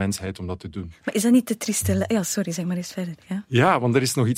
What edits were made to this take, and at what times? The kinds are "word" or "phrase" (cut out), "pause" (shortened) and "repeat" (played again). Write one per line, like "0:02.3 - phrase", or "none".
none